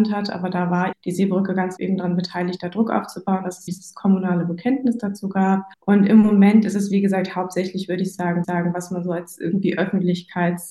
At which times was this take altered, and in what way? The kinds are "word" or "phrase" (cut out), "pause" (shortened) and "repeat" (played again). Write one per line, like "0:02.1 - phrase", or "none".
0:00.9 - word
0:01.8 - word
0:03.7 - word
0:05.7 - pause
0:08.4 - repeat